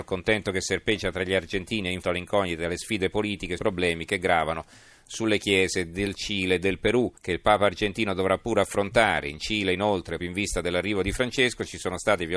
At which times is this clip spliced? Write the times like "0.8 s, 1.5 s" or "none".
2.0 s, 3.6 s, 7.2 s, 10.2 s